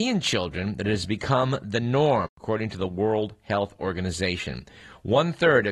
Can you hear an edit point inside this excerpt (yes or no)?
no